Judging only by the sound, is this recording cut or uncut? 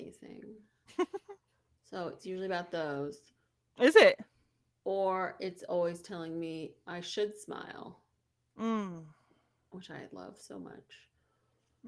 uncut